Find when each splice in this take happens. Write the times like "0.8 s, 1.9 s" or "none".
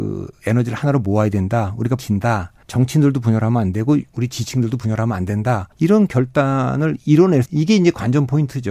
2.0 s, 2.6 s, 4.1 s, 5.7 s, 7.5 s